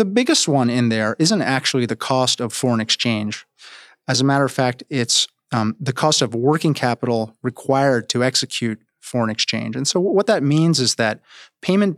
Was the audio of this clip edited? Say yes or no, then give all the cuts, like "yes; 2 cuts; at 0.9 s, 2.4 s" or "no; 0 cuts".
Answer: no; 0 cuts